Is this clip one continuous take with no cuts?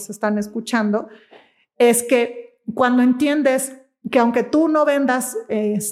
yes; 0 cuts

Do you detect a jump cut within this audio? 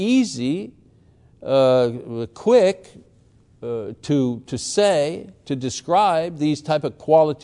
no; 0 cuts

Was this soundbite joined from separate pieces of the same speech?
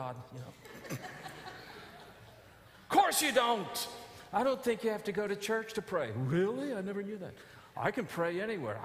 no; 0 cuts

